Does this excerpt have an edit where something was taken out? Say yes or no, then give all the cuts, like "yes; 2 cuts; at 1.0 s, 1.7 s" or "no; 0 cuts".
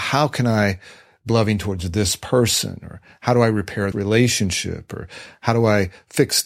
yes; 2 cuts; at 1.3 s, 3.9 s